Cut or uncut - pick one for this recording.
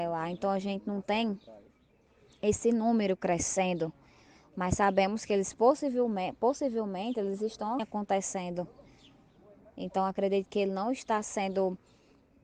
cut